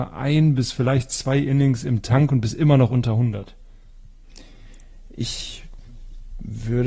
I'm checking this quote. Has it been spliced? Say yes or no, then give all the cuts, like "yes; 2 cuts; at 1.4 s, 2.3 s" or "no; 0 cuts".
no; 0 cuts